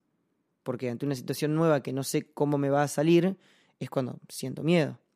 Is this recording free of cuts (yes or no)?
yes